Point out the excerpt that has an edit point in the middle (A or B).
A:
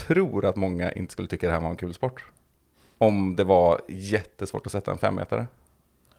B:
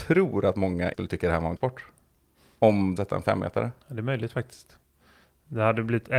B